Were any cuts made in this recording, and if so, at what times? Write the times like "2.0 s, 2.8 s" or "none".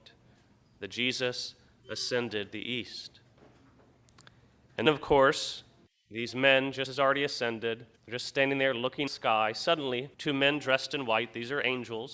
2.5 s, 4.9 s, 5.9 s, 6.9 s, 8.0 s, 9.1 s, 10.1 s